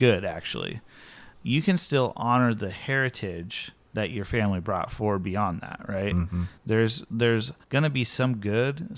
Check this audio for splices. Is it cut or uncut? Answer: cut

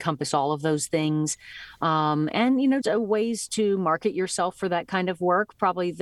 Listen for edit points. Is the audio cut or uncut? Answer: cut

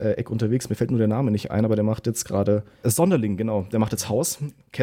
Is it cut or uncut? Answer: cut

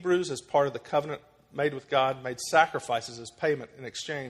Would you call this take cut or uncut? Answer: uncut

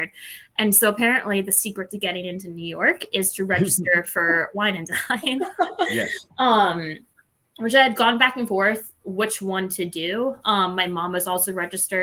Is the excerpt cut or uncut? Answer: uncut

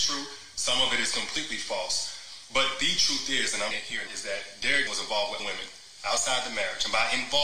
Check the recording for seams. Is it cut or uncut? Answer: cut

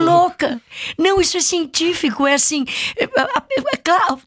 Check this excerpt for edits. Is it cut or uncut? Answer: uncut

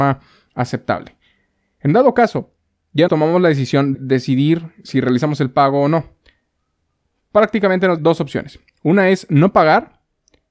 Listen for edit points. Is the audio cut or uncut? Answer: cut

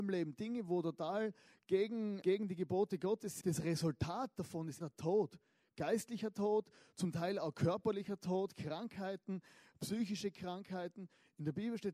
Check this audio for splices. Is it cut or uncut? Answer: cut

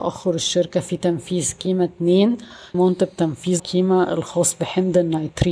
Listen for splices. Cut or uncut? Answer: cut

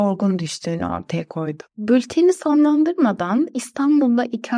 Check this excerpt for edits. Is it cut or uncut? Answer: cut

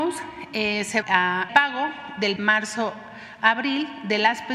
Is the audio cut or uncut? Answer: cut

